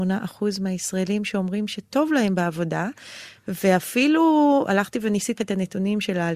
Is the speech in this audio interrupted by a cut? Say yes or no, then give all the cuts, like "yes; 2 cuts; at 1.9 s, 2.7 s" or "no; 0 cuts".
yes; 1 cut; at 5.4 s